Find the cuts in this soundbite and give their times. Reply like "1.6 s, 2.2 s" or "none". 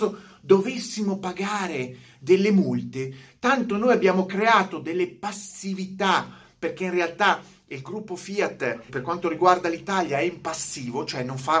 8.9 s